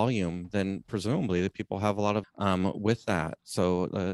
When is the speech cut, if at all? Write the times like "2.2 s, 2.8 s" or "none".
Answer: 2.2 s